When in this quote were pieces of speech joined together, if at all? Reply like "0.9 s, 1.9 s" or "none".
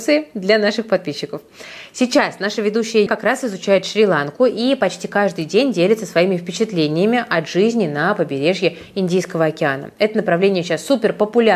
3.1 s